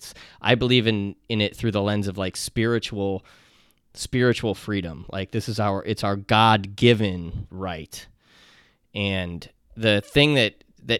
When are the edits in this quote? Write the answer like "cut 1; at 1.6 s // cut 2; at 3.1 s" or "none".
none